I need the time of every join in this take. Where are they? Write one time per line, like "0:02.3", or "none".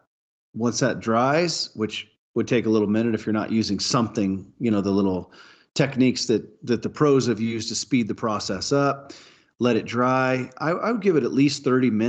none